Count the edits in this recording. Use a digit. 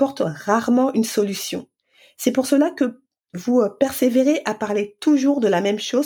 1